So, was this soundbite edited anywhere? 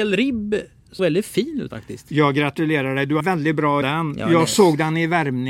yes; 4 cuts; at 1.0 s, 1.7 s, 3.2 s, 3.8 s

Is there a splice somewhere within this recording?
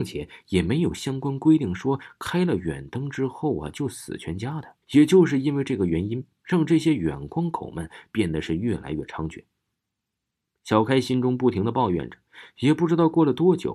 yes; 1 cut; at 4.8 s

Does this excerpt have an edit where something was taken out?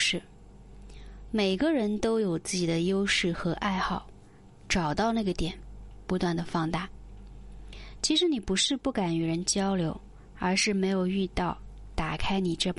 no; 0 cuts

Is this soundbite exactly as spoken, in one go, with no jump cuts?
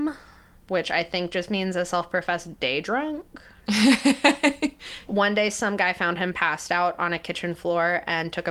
yes; 0 cuts

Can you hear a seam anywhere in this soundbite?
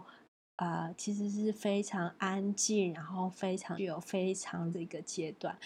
yes; 2 cuts; at 3.8 s, 4.7 s

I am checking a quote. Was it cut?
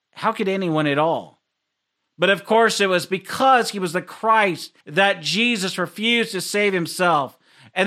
yes; 1 cut; at 4.8 s

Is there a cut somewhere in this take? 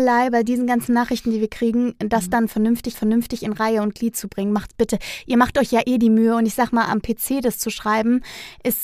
yes; 1 cut; at 2.9 s

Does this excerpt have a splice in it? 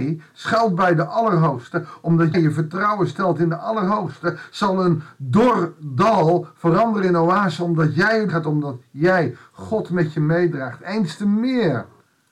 yes; 2 cuts; at 2.3 s, 8.3 s

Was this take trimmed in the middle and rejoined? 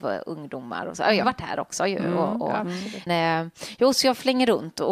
yes; 2 cuts; at 1.2 s, 3.1 s

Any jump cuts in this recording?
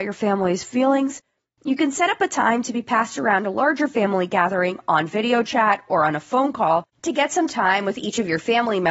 no; 0 cuts

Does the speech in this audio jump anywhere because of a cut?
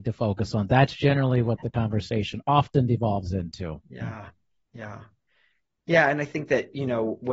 no; 0 cuts

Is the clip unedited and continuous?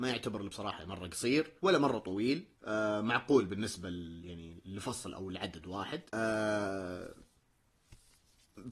no; 3 cuts; at 1.6 s, 2.5 s, 6.1 s

